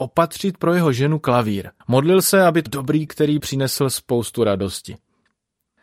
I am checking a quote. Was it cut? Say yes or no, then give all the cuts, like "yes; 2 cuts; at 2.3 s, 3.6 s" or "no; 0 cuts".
yes; 4 cuts; at 1.8 s, 2.7 s, 3.1 s, 3.4 s